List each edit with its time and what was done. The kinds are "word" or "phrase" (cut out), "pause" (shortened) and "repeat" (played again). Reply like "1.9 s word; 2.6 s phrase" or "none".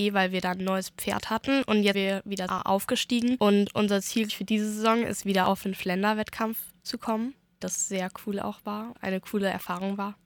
1.9 s word; 2.5 s word; 4.3 s word; 5.6 s word; 7.6 s word; 8.9 s word